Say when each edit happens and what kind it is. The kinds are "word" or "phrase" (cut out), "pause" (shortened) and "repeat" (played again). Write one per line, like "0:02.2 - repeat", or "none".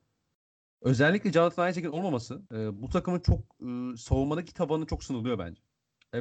0:02.5 - pause